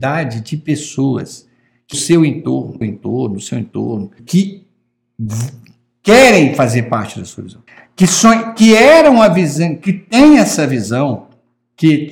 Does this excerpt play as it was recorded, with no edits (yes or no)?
no